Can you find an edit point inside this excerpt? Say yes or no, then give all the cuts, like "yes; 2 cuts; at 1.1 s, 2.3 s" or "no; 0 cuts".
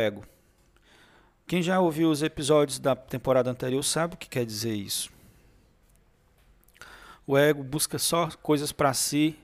no; 0 cuts